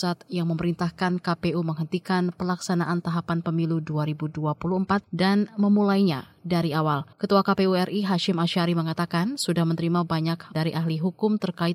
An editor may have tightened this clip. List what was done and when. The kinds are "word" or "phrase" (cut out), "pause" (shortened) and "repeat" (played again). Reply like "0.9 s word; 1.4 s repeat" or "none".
5.0 s pause; 7.1 s pause; 10.5 s word